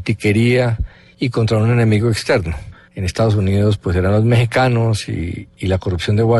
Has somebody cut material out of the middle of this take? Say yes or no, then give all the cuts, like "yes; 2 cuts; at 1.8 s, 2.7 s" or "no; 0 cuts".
no; 0 cuts